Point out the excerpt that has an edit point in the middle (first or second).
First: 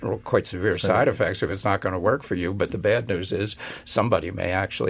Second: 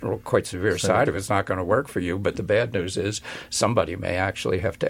second